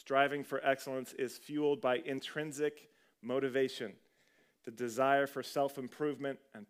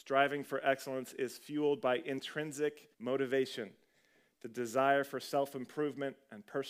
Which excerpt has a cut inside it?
second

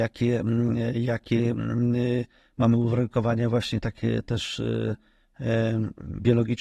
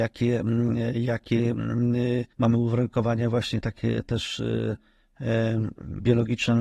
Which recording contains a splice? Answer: second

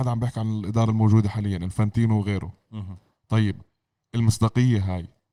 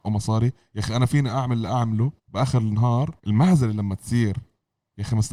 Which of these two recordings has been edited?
second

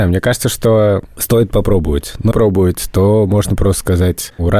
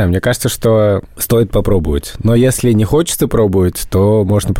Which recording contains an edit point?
first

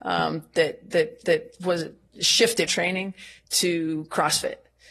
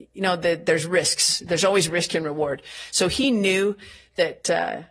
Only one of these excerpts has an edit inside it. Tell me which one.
first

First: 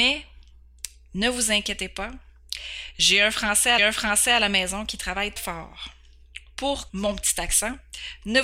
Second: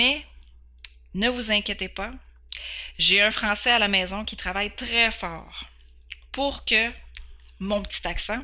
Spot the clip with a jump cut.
first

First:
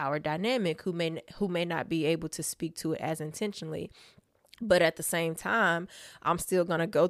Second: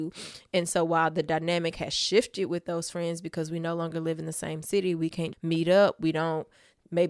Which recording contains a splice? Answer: second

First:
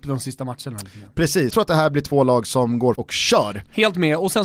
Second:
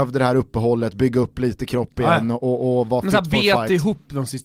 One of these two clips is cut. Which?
first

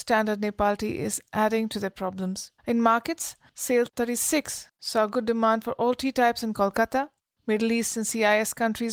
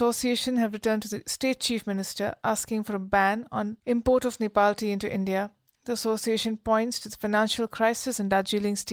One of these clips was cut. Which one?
first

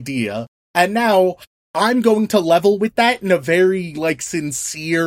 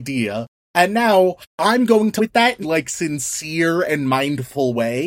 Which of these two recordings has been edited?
second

